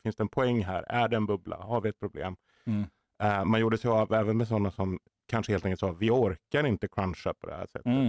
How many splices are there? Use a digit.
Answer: 0